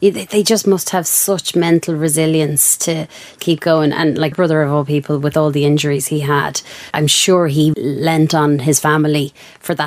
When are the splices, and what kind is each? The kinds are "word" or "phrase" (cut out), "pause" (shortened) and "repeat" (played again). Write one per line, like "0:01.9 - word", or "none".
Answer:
0:03.4 - word
0:04.3 - word
0:06.9 - word
0:07.7 - word